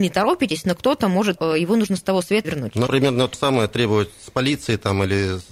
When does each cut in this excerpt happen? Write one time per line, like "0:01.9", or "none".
0:01.4
0:02.4
0:02.9
0:03.3

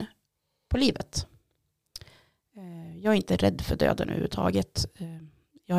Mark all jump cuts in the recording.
none

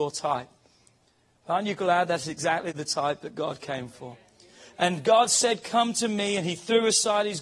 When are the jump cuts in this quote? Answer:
none

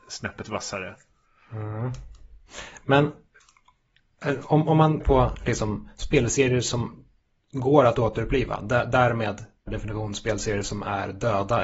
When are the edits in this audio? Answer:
0:05.0
0:09.7

